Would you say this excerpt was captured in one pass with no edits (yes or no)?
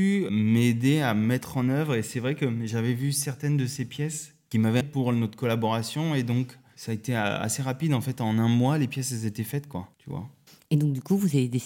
no